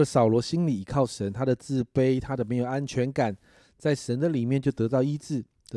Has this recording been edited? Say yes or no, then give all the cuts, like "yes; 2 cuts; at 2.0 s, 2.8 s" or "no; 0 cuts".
no; 0 cuts